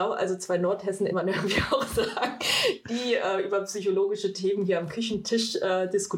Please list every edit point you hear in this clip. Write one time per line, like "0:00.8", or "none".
0:01.1